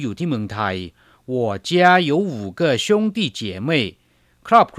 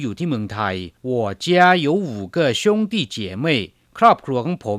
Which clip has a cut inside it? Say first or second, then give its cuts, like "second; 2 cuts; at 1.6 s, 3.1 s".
second; 2 cuts; at 1.0 s, 3.9 s